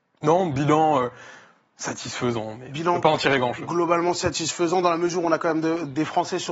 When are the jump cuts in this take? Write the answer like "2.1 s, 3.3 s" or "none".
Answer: none